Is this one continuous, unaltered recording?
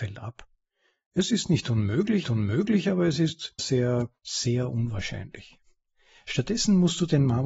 no; 2 cuts; at 2.2 s, 3.6 s

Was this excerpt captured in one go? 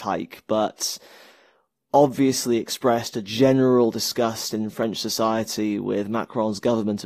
yes; 0 cuts

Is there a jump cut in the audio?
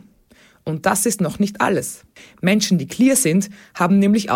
no; 0 cuts

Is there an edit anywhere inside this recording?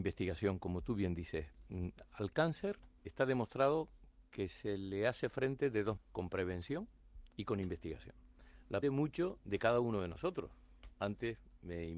yes; 4 cuts; at 3.0 s, 6.0 s, 7.3 s, 8.8 s

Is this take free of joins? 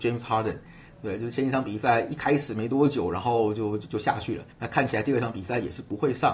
no; 1 cut; at 4.5 s

